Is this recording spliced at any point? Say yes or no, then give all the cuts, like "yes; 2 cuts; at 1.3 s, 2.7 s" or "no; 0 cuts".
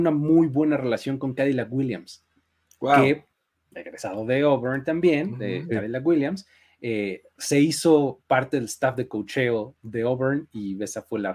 no; 0 cuts